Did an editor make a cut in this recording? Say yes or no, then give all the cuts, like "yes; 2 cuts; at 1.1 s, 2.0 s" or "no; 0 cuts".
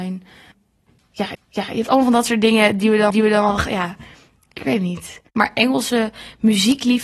yes; 3 cuts; at 1.3 s, 3.1 s, 5.3 s